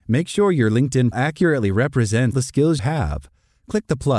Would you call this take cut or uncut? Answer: cut